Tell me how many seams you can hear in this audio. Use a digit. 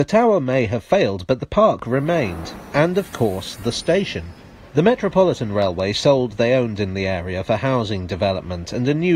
2